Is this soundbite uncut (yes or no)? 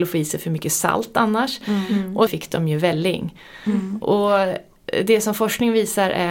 no